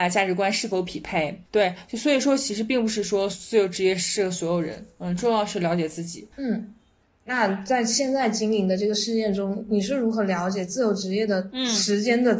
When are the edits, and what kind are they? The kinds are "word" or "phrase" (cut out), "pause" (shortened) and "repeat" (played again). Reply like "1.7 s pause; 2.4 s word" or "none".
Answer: 1.5 s pause; 6.3 s pause